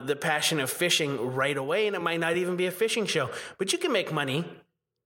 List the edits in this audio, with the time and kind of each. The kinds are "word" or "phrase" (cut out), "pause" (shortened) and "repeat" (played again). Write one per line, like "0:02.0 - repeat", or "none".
none